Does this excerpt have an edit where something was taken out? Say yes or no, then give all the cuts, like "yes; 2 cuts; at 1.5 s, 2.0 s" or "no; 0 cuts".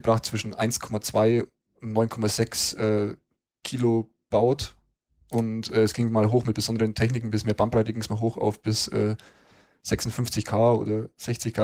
no; 0 cuts